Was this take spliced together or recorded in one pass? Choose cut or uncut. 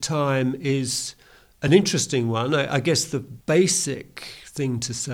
uncut